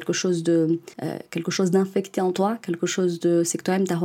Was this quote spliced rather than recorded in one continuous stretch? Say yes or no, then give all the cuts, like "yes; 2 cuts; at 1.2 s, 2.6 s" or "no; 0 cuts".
yes; 1 cut; at 0.9 s